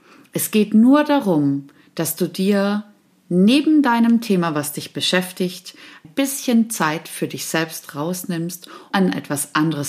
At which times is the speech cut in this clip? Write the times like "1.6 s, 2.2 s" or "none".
6.0 s, 8.9 s